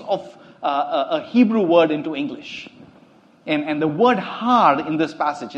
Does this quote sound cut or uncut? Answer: uncut